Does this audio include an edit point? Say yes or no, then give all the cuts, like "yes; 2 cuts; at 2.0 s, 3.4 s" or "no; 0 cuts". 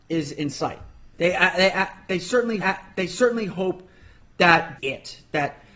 yes; 3 cuts; at 1.1 s, 2.6 s, 4.8 s